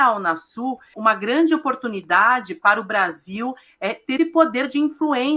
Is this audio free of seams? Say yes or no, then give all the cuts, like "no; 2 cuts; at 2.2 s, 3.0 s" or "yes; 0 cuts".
no; 2 cuts; at 0.9 s, 4.2 s